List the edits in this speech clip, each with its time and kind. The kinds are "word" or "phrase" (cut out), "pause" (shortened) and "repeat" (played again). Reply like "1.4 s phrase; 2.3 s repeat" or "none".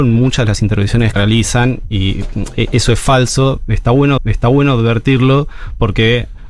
1.1 s word; 4.2 s repeat